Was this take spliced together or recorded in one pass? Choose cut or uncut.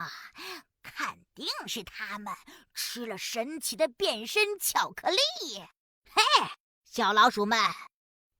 uncut